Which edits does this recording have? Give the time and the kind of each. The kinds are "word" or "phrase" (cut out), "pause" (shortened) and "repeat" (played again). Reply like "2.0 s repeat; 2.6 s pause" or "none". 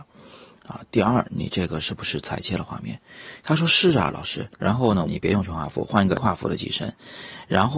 4.5 s pause; 5.1 s phrase; 6.2 s word

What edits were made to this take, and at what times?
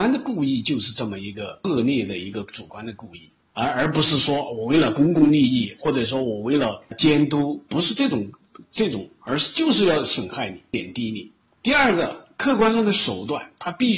7.7 s word

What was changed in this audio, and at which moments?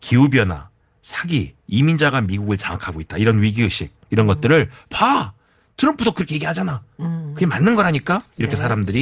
none

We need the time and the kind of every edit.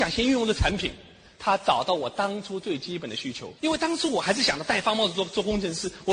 3.6 s pause

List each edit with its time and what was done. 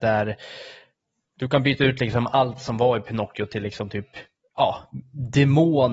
none

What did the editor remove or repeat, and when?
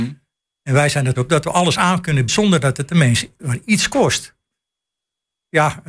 1.2 s word; 2.3 s word; 3.4 s word

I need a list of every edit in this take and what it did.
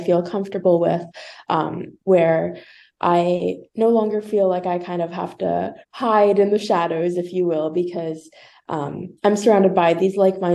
3.7 s pause; 5.8 s pause; 9.2 s pause

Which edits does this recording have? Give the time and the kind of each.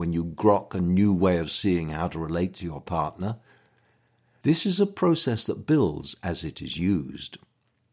none

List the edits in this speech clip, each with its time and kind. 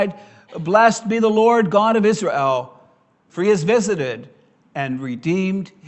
none

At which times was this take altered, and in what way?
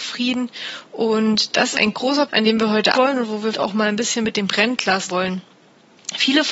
1.7 s word; 2.3 s word; 2.9 s word; 3.5 s word; 5.1 s word

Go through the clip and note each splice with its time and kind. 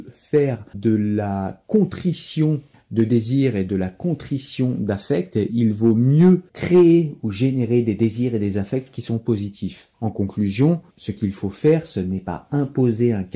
2.7 s pause; 6.5 s pause; 9.9 s pause; 10.9 s pause

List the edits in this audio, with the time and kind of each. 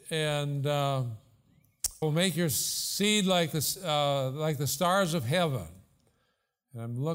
2.0 s word

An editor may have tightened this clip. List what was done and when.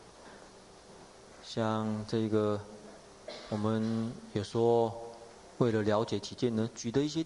none

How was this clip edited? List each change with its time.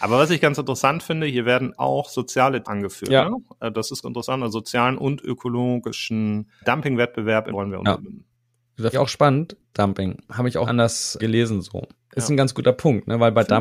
1.8 s word; 2.6 s word; 4.0 s word; 6.6 s word; 7.5 s word; 8.9 s word; 9.7 s word; 10.6 s word; 11.2 s word

